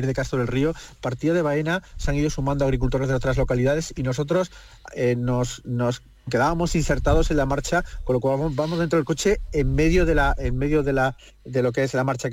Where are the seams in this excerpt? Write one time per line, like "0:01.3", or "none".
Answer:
none